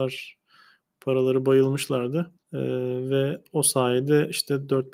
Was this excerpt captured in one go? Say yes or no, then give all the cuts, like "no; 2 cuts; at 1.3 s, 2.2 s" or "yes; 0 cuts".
no; 1 cut; at 2.4 s